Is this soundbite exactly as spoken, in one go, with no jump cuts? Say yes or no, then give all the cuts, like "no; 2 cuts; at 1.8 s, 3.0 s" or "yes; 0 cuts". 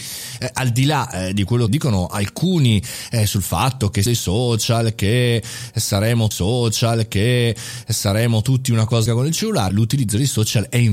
no; 5 cuts; at 1.7 s, 4.1 s, 6.3 s, 9.1 s, 9.7 s